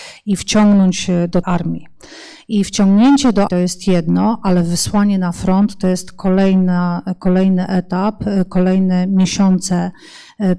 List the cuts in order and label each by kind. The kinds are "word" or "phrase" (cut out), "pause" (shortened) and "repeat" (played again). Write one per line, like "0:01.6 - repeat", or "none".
0:01.4 - word
0:03.5 - word